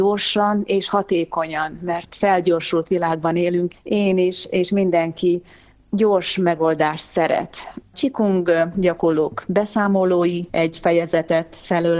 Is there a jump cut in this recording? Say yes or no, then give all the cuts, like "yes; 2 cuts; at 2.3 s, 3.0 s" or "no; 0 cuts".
yes; 3 cuts; at 3.7 s, 7.9 s, 10.5 s